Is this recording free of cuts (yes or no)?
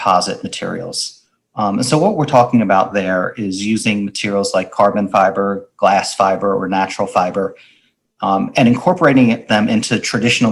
yes